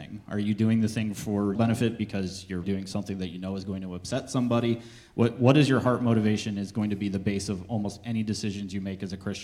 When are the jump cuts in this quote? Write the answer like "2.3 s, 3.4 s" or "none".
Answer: 1.5 s, 2.6 s